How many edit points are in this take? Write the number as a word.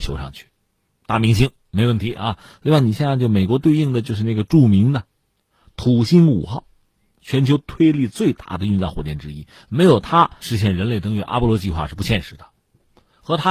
one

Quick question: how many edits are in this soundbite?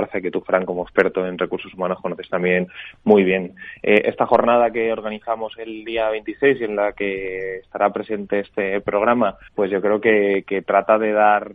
one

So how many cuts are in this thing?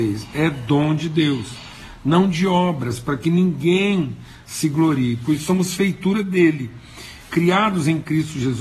zero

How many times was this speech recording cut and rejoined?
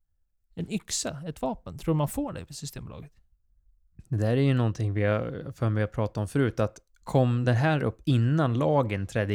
zero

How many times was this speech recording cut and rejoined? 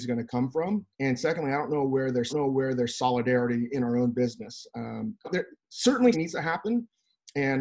four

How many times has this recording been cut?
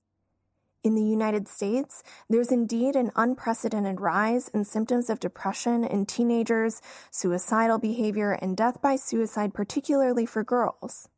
zero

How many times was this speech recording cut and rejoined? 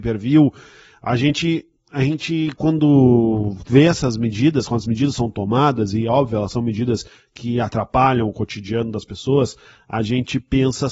zero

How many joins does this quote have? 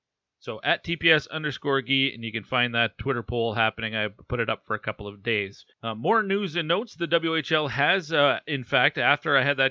one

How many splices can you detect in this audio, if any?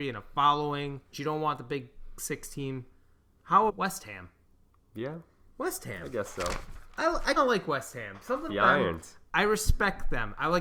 four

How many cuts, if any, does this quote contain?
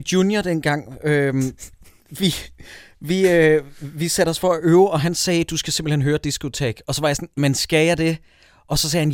one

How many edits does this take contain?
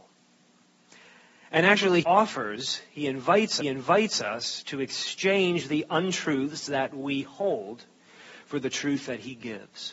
two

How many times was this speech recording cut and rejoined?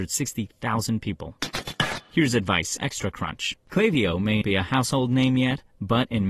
two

